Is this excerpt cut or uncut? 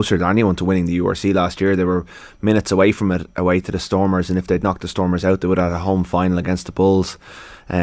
uncut